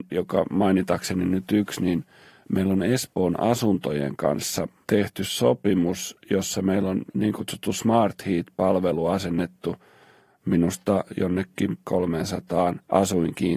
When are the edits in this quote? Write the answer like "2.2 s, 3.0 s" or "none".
none

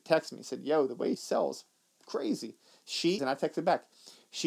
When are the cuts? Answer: 1.1 s, 3.2 s

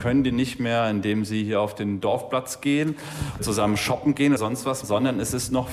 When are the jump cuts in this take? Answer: 3.4 s, 4.4 s, 4.8 s

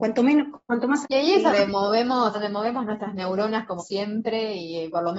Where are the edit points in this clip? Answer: 1.0 s, 1.5 s, 2.3 s, 3.8 s

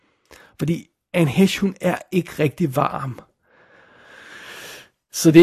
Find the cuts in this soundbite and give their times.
none

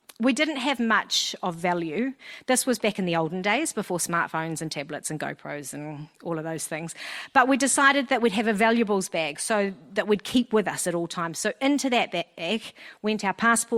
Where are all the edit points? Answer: none

